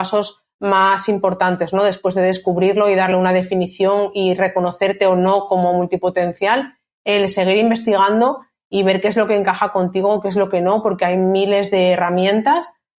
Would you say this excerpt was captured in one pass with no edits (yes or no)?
yes